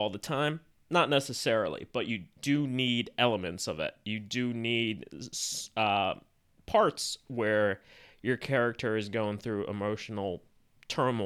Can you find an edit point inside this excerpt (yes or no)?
no